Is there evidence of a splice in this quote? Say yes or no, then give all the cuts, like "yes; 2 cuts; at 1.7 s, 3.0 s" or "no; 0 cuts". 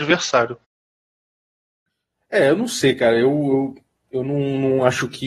no; 0 cuts